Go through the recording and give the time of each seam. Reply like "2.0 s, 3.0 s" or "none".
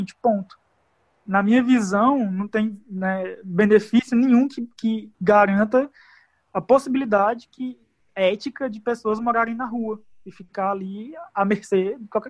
none